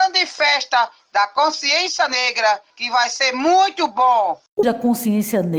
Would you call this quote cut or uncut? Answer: cut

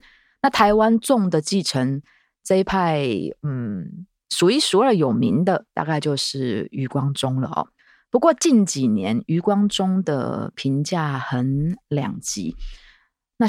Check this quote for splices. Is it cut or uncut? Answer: uncut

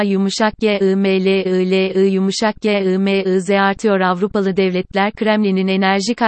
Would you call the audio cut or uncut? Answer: uncut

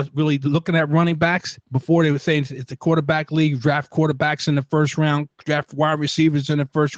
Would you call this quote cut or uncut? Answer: uncut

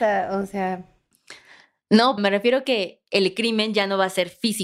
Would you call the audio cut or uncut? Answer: cut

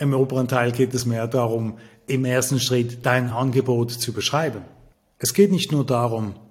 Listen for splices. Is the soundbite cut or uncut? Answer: uncut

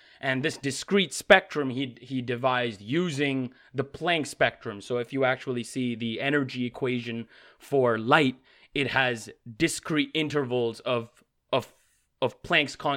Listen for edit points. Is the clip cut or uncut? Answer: uncut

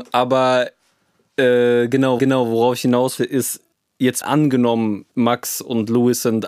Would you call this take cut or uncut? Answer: cut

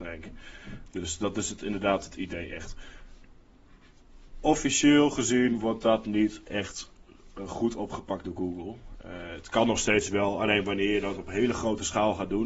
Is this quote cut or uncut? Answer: uncut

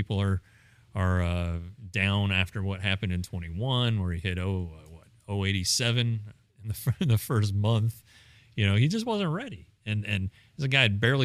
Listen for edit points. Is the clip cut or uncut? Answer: uncut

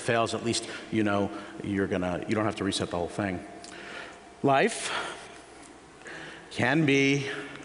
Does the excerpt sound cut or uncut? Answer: uncut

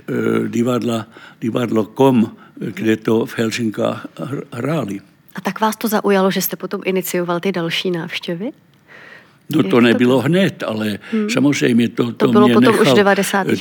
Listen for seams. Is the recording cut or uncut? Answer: uncut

